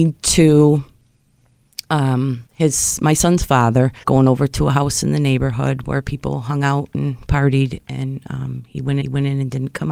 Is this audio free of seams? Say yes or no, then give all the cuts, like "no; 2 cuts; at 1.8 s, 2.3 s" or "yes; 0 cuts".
no; 3 cuts; at 2.5 s, 4.0 s, 9.0 s